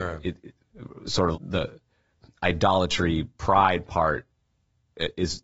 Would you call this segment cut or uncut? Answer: cut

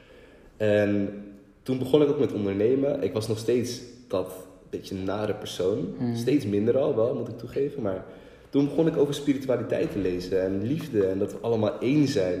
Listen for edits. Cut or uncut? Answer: uncut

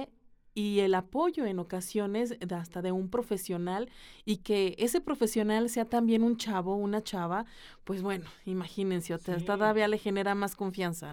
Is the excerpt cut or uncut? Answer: uncut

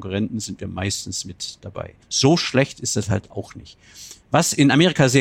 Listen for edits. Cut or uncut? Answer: cut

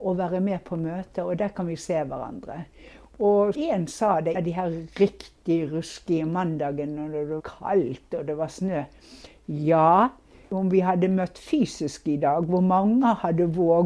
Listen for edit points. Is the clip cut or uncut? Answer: cut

